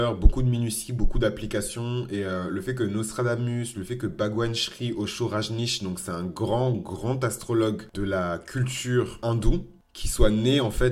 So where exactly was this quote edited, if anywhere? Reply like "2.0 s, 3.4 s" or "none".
6.7 s

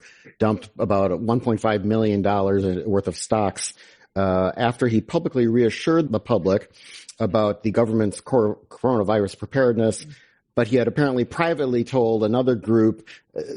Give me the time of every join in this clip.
6.1 s

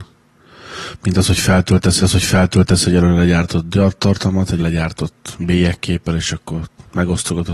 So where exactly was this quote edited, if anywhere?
2.0 s, 4.6 s

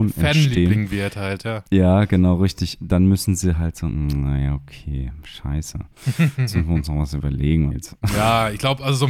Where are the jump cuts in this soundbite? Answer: 7.7 s

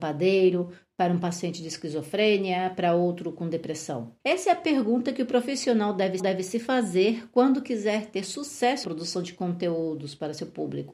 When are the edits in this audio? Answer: 4.2 s, 6.2 s, 8.8 s

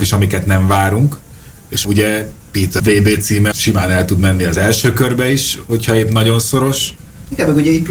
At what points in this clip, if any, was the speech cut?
1.8 s, 2.8 s, 3.5 s

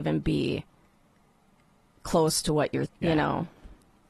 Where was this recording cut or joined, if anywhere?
2.8 s

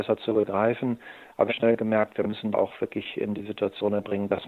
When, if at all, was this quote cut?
1.5 s, 2.5 s

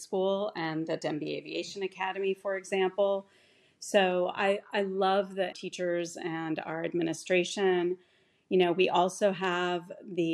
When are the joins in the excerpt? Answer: 5.5 s

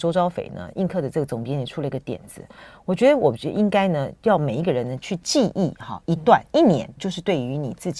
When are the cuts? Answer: 7.0 s

